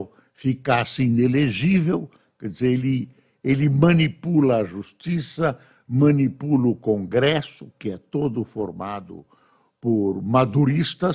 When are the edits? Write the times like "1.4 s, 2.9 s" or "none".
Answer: none